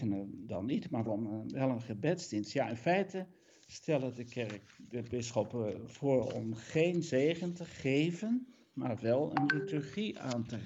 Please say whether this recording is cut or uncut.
cut